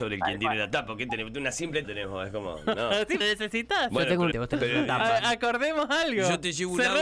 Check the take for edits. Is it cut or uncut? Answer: cut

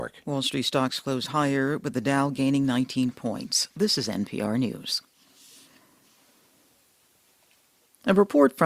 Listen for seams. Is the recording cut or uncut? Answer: uncut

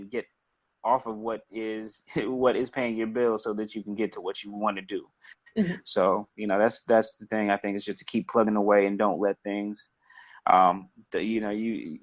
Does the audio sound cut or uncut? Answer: uncut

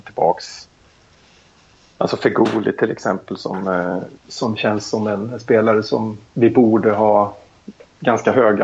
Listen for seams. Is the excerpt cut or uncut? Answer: cut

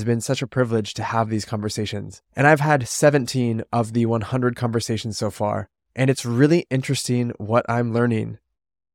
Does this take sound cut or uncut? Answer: cut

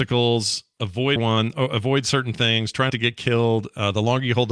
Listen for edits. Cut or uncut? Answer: cut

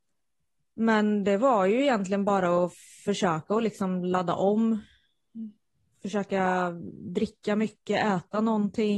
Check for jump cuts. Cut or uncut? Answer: uncut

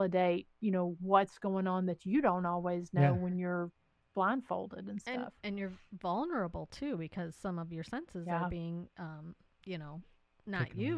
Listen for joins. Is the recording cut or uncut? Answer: uncut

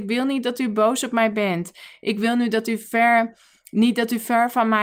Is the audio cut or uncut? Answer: uncut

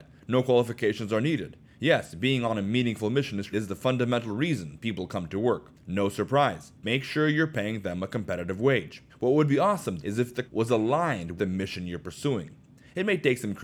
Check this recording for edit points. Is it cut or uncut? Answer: cut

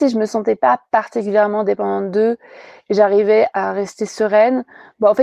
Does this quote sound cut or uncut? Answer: cut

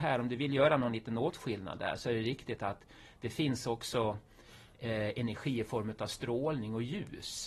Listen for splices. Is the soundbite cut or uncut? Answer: uncut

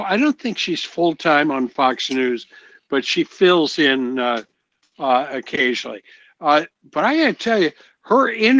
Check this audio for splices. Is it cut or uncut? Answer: uncut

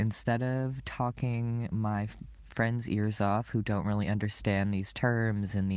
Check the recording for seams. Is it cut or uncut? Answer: uncut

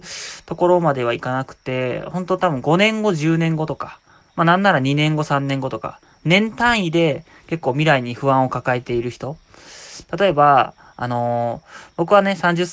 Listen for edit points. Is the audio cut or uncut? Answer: uncut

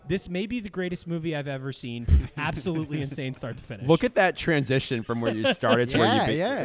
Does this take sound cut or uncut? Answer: uncut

